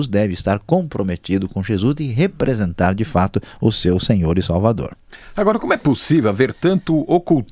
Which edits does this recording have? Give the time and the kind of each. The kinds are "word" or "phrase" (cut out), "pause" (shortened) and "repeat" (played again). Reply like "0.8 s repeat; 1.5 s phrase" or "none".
none